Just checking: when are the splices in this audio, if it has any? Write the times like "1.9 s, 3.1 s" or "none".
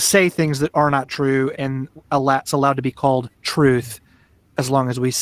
1.5 s, 2.5 s, 3.3 s